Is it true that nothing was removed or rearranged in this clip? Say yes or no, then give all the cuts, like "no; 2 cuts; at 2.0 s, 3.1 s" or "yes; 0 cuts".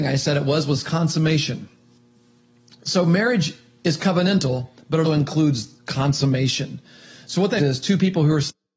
no; 2 cuts; at 5.0 s, 7.6 s